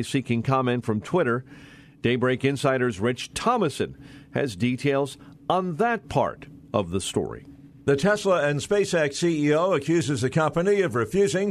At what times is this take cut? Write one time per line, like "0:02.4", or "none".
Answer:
none